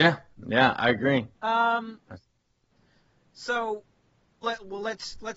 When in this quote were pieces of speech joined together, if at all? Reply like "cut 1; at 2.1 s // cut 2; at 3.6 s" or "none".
cut 1; at 1.3 s // cut 2; at 4.4 s